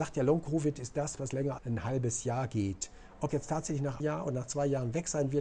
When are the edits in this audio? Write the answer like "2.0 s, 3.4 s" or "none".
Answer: 1.2 s, 1.6 s, 3.3 s, 4.0 s